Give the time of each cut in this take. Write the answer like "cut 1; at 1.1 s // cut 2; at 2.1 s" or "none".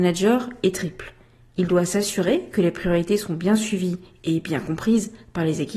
none